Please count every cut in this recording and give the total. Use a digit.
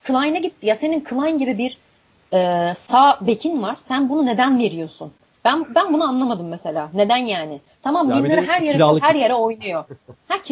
0